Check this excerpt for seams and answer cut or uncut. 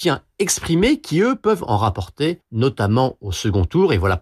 cut